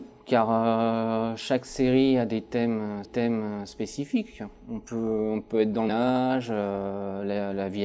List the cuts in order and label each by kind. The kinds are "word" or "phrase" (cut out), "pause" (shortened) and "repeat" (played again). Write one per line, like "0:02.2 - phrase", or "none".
0:03.0 - repeat
0:05.9 - word